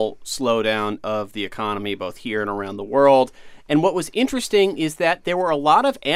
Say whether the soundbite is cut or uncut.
uncut